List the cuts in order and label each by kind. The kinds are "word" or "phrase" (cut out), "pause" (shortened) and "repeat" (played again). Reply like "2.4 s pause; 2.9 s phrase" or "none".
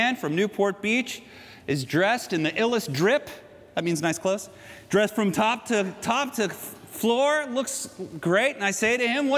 none